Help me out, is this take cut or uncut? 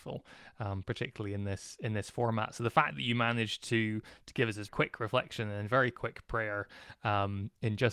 cut